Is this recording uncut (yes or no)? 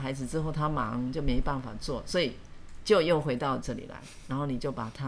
no